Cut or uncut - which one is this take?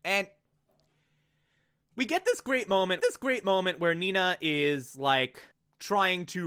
cut